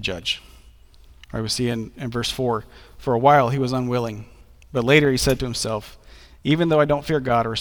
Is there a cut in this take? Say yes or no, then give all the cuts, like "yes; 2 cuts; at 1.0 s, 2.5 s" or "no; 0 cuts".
no; 0 cuts